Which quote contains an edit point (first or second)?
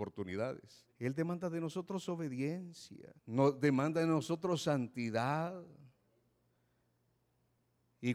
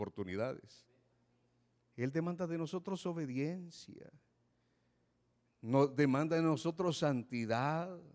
first